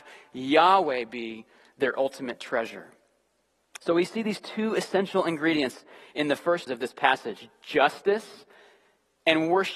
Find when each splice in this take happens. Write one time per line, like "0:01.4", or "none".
0:06.7